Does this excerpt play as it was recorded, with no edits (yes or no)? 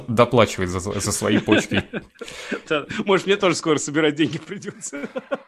yes